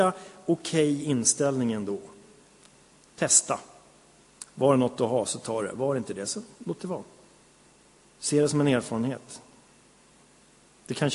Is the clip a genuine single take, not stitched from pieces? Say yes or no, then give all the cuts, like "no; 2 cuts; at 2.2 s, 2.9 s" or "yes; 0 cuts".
yes; 0 cuts